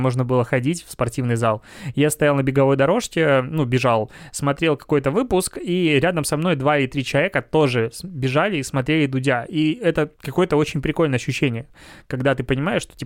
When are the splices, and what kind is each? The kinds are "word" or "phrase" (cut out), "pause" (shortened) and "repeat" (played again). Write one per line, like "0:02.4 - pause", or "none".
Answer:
0:10.1 - pause